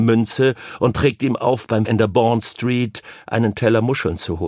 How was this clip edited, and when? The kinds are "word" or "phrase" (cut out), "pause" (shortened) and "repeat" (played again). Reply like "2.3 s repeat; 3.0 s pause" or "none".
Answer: 1.9 s word